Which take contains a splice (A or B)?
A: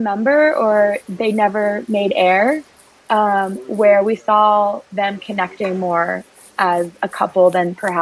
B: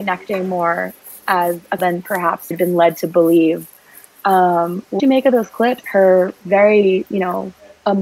B